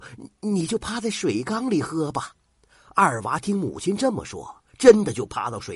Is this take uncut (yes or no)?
no